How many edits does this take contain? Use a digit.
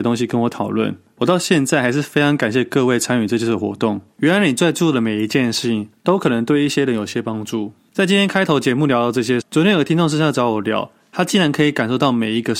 1